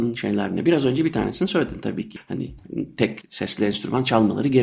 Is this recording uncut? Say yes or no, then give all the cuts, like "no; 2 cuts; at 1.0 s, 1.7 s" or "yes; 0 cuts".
yes; 0 cuts